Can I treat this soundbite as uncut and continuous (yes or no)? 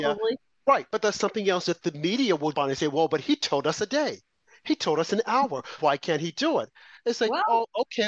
no